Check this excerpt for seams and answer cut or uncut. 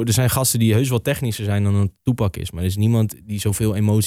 uncut